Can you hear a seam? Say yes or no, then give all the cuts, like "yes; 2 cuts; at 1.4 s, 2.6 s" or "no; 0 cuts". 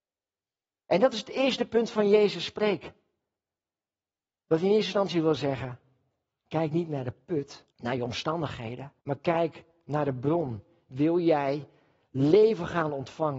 yes; 2 cuts; at 7.7 s, 9.0 s